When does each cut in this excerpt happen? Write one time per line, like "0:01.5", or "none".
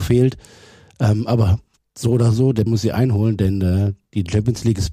0:02.7